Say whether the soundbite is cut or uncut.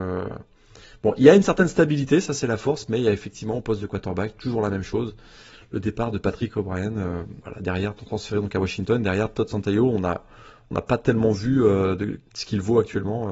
cut